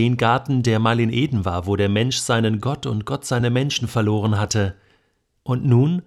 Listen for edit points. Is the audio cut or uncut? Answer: uncut